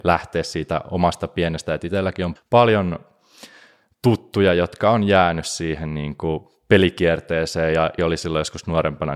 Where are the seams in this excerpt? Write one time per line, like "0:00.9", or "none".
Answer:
0:01.7
0:02.4
0:08.0